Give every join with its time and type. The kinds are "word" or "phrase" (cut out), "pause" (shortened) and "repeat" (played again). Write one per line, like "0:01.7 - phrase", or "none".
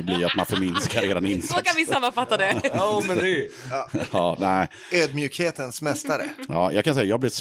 none

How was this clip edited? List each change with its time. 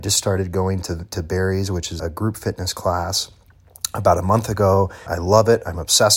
0:02.0 - word
0:05.1 - word

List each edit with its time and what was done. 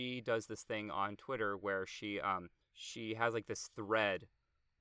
0:02.6 - pause

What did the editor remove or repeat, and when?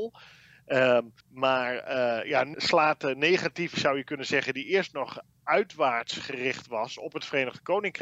0:01.2 - pause
0:02.5 - word
0:03.7 - word

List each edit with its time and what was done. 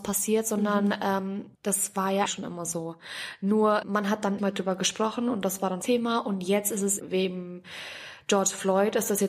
0:01.5 - pause
0:02.3 - word
0:03.8 - word
0:04.4 - phrase
0:05.8 - phrase
0:07.0 - word

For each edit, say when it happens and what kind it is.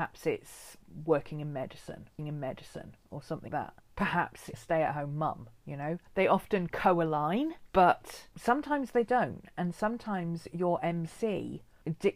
0:02.2 - repeat
0:03.5 - word
0:04.5 - phrase
0:06.1 - pause

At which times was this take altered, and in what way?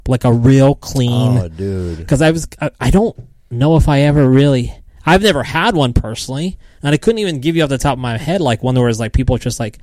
none

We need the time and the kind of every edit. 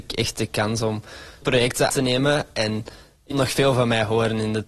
0:01.4 - word
0:01.9 - word
0:03.3 - word

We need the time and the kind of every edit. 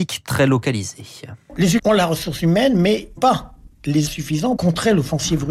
0:01.8 - word
0:03.2 - word
0:04.1 - word
0:04.6 - word

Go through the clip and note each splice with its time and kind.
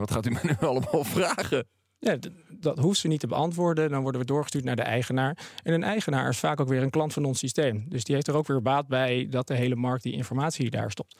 none

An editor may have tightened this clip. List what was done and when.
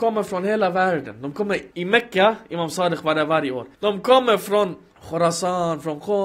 0:01.7 - pause
0:03.7 - pause
0:04.9 - pause

